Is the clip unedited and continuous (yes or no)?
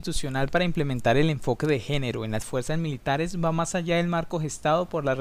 yes